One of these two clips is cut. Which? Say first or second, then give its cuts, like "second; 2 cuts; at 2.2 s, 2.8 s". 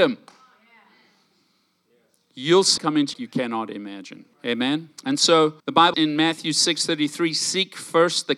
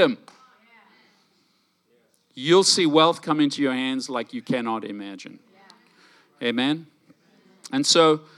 first; 6 cuts; at 2.8 s, 3.1 s, 4.3 s, 5.0 s, 5.6 s, 5.9 s